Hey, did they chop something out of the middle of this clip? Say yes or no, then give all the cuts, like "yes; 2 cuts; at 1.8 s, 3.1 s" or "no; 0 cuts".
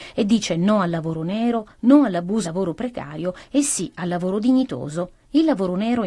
yes; 1 cut; at 2.4 s